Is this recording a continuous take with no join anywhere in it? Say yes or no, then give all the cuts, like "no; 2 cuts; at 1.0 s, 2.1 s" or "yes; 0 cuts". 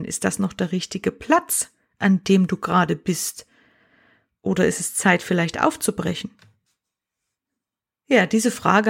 yes; 0 cuts